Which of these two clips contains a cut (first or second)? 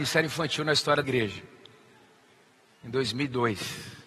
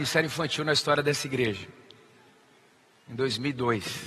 first